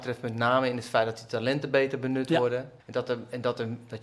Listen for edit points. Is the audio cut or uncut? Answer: cut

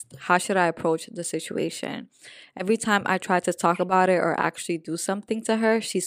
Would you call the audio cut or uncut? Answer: uncut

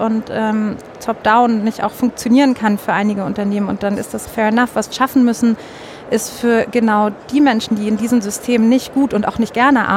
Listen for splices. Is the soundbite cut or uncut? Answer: cut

